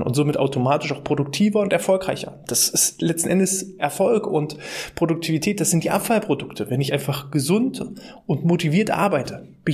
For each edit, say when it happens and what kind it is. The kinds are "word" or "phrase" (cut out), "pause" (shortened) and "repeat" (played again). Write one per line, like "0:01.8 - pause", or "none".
none